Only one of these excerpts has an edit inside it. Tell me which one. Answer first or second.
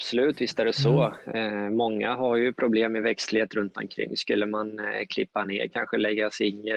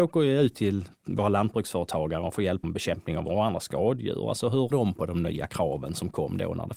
second